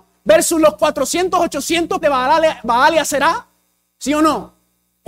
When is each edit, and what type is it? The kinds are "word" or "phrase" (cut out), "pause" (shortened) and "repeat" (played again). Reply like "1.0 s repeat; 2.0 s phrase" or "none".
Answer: 2.0 s word